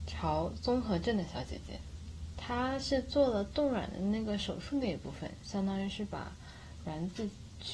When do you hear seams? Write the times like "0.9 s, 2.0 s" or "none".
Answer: 2.3 s